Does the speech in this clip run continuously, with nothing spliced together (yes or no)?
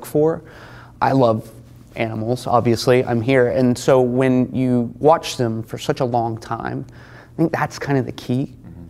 yes